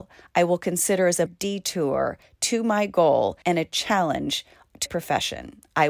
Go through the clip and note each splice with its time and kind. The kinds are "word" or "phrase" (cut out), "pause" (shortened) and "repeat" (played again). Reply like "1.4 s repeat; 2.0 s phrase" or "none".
1.3 s word; 3.4 s pause; 4.9 s word

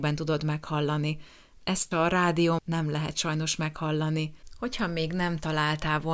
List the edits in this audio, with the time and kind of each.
1.9 s phrase; 2.6 s word

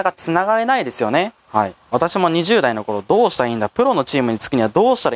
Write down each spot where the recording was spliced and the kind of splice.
1.4 s pause

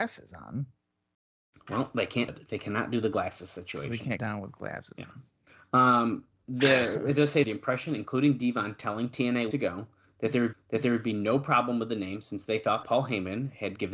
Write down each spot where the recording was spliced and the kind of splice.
2.3 s word; 4.2 s word; 5.5 s pause; 7.4 s phrase; 9.5 s word; 10.5 s repeat; 12.8 s word

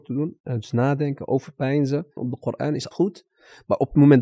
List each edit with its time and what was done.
2.2 s word; 2.9 s word

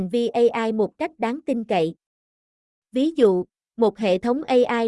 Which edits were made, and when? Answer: none

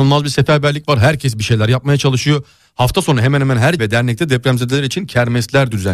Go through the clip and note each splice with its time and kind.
3.8 s word

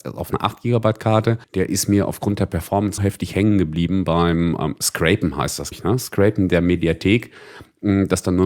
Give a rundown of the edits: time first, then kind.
1.4 s pause; 3.0 s phrase; 4.6 s word; 5.7 s word

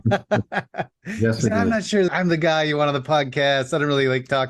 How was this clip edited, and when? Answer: 2.1 s word

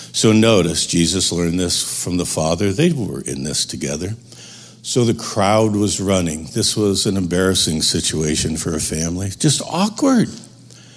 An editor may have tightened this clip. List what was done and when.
none

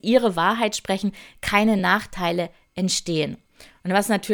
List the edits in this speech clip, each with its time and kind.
none

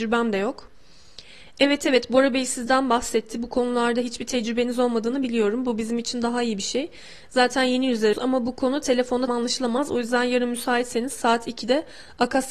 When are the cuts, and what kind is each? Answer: 8.1 s word; 9.3 s word

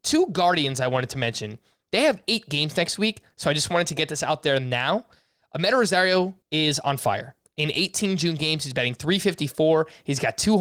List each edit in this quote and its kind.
6.4 s pause

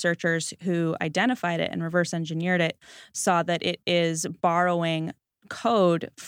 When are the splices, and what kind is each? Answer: none

